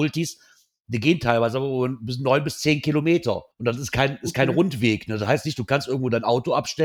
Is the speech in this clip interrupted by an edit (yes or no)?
yes